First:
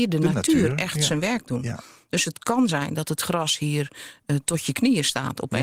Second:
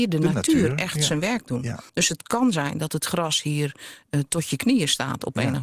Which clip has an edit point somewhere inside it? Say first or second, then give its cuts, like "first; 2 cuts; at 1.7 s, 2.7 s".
second; 1 cut; at 1.9 s